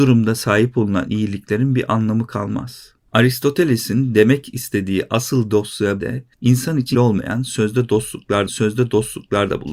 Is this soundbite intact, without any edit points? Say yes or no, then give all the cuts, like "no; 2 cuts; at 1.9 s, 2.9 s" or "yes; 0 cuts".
no; 4 cuts; at 6.0 s, 6.3 s, 6.9 s, 8.5 s